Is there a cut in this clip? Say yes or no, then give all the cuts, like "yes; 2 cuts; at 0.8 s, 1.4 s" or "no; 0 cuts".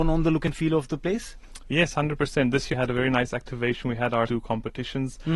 yes; 2 cuts; at 2.7 s, 4.3 s